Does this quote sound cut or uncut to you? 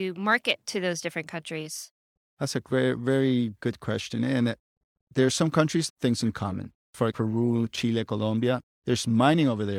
cut